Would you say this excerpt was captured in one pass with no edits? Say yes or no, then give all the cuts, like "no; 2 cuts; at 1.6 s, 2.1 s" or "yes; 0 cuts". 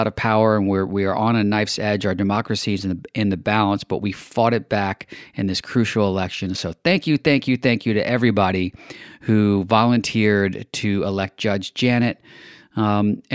yes; 0 cuts